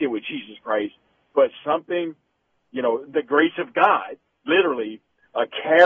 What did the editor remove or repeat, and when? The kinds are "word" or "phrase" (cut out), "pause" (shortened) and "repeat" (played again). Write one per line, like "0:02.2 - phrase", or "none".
none